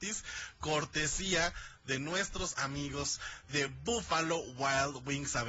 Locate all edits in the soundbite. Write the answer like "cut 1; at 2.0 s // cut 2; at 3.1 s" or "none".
none